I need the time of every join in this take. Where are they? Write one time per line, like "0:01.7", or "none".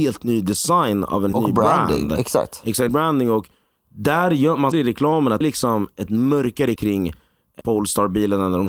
0:01.3
0:02.9
0:04.7
0:05.4
0:06.8
0:07.6

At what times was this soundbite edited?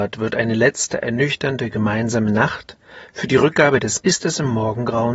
0:04.0

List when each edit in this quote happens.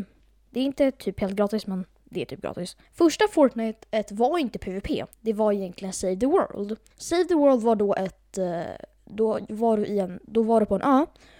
0:02.9
0:03.8
0:05.1
0:06.9

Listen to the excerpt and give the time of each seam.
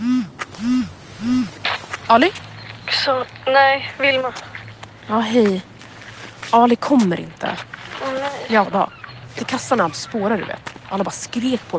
0:08.6
0:09.4
0:09.9

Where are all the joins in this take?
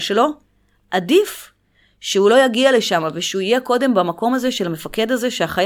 none

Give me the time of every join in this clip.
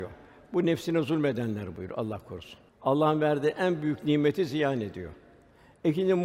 0:02.7

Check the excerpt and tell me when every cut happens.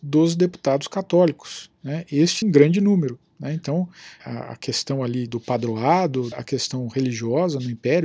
0:02.4
0:04.2
0:05.3
0:06.3

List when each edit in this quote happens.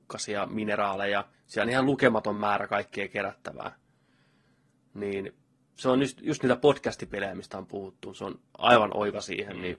0:01.3
0:05.4

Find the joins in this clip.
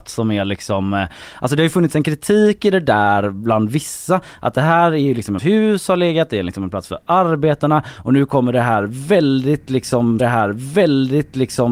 0:05.4
0:10.2

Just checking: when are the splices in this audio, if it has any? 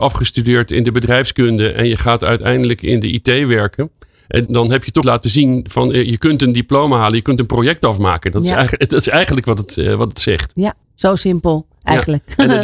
0:04.5
0:05.0
0:10.8

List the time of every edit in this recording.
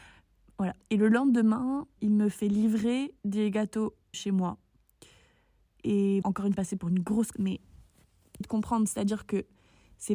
0:02.0
0:03.2
0:04.1
0:06.2
0:06.5
0:07.3
0:08.4

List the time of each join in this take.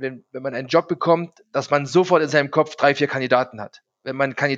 none

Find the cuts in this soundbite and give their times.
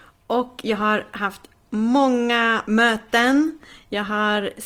none

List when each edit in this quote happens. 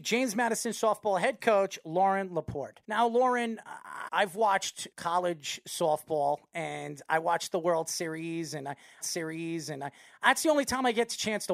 0:02.8
0:04.1
0:04.9
0:09.0

